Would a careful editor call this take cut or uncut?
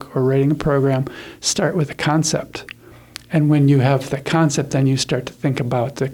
uncut